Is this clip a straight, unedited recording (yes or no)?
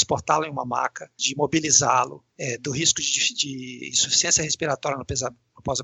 no